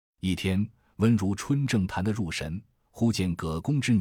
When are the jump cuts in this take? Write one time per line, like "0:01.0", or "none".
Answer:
none